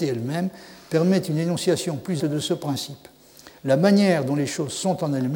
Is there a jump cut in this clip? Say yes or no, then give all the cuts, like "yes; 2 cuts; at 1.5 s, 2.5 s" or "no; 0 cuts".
yes; 1 cut; at 2.2 s